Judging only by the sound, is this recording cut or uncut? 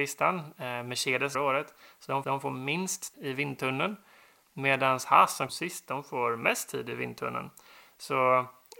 cut